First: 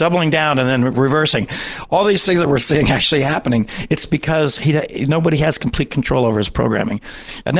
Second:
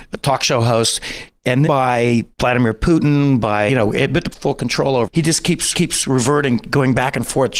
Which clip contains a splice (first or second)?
second